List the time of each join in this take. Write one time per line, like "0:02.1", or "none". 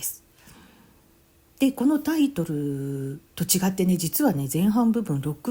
0:03.3